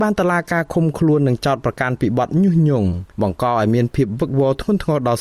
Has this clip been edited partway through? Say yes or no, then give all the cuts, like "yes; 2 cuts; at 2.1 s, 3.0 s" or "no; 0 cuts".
yes; 1 cut; at 3.1 s